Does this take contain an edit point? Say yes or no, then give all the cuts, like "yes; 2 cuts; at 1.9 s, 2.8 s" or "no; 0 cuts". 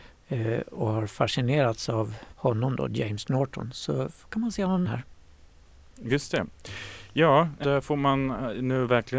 yes; 3 cuts; at 2.3 s, 4.8 s, 7.6 s